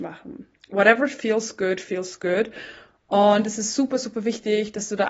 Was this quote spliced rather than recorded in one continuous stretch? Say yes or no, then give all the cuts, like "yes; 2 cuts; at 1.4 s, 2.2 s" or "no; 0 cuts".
no; 0 cuts